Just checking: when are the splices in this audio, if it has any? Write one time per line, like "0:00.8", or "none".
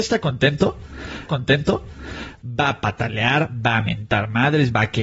0:01.3